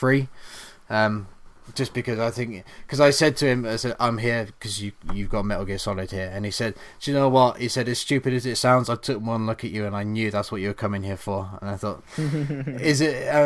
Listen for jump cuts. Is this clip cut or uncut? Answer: uncut